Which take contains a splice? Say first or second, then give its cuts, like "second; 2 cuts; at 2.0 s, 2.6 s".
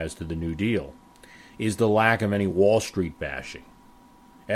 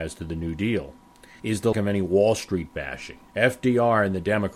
second; 3 cuts; at 1.4 s, 1.7 s, 3.3 s